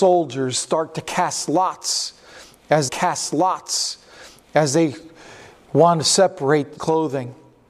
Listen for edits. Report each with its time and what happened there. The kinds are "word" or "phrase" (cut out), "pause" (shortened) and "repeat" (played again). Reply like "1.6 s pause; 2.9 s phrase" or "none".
2.9 s repeat; 6.8 s word